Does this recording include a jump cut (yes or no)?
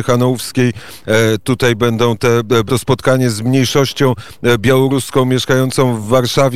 yes